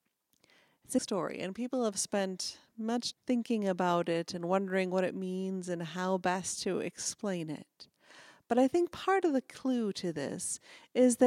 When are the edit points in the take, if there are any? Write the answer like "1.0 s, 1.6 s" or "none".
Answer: 1.0 s, 3.1 s